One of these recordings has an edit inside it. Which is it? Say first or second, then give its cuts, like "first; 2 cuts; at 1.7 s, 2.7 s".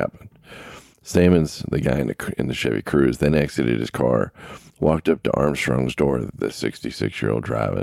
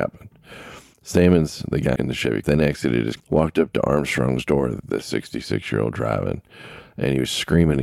second; 3 cuts; at 2.0 s, 2.4 s, 3.2 s